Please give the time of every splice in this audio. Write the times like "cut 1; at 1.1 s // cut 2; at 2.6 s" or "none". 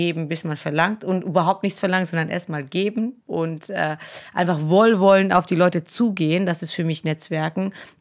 cut 1; at 3.2 s